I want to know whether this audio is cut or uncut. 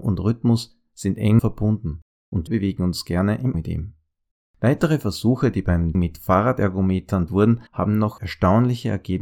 cut